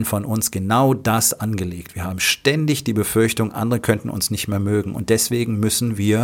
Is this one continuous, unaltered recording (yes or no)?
yes